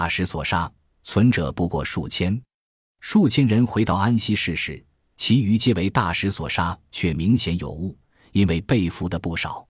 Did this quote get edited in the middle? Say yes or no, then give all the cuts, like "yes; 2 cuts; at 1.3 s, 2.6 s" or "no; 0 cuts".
no; 0 cuts